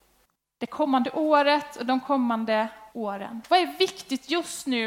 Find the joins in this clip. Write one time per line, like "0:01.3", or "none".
0:02.9